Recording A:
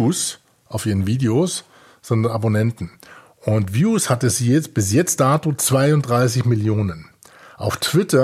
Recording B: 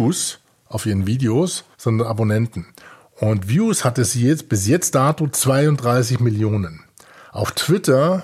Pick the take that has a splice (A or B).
B